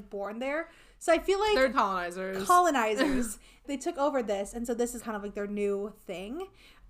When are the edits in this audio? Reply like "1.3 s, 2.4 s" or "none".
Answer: 1.7 s, 3.6 s, 5.0 s

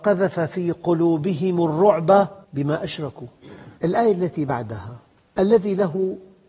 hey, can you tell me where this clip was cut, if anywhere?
2.4 s, 3.8 s, 5.2 s

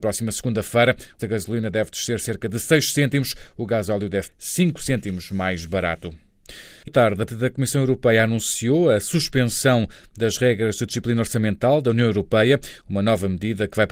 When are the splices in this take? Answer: 1.2 s, 4.3 s, 6.9 s, 7.3 s

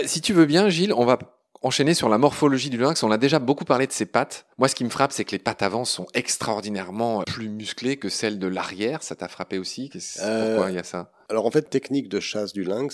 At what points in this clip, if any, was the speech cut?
4.5 s, 7.2 s, 11.7 s

